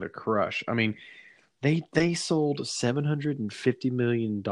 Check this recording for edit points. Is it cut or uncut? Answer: uncut